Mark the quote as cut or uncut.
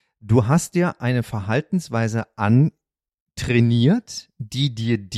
uncut